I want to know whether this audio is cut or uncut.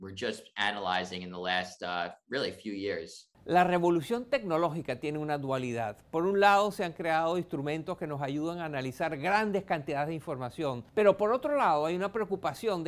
uncut